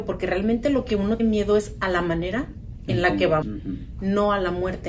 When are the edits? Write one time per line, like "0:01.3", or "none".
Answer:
0:01.2
0:03.4

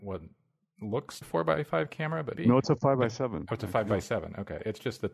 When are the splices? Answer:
0:01.2
0:02.4

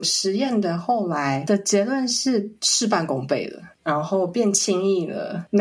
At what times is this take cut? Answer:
0:03.7

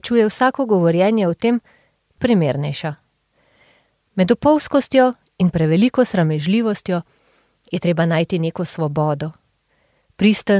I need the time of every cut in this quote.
0:02.2

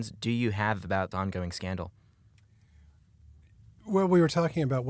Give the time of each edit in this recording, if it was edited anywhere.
0:01.1

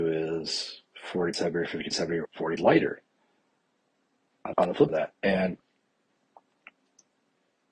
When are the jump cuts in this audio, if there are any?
0:01.3
0:01.9
0:02.3
0:02.6
0:04.5
0:04.9

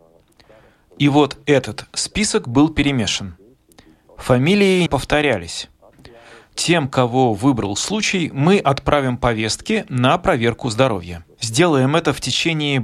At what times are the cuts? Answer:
0:04.9

